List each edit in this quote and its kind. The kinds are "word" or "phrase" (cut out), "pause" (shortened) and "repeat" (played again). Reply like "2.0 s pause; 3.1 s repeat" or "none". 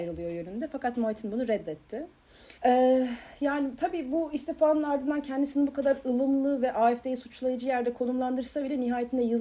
2.6 s pause

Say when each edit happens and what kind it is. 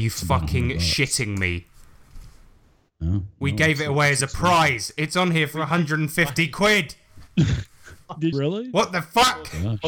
8.3 s word

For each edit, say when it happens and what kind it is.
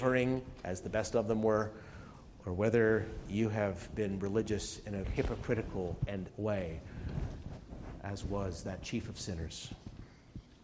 5.0 s word; 6.3 s word

